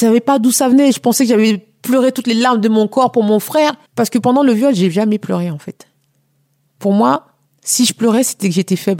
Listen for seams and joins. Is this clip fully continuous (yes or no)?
no